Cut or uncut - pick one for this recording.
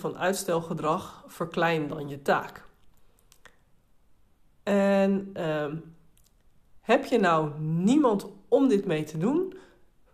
uncut